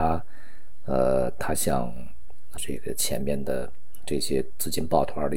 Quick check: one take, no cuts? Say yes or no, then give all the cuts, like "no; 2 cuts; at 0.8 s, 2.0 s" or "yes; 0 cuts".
no; 1 cut; at 2.6 s